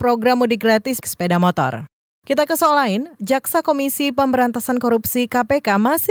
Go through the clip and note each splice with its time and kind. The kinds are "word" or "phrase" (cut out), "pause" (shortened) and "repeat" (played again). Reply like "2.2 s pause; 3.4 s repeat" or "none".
1.0 s phrase; 2.1 s pause